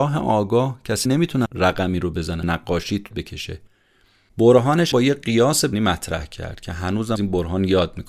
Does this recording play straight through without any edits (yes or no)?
no